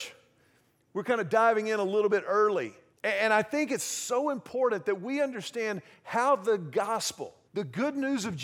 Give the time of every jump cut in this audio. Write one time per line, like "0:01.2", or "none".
0:02.9
0:07.5